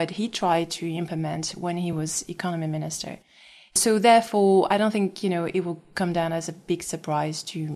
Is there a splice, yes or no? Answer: no